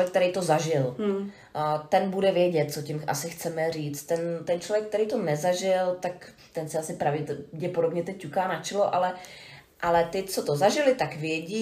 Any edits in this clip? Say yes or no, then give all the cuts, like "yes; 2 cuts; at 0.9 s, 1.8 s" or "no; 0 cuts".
no; 0 cuts